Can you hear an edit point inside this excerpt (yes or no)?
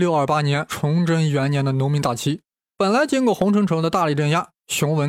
no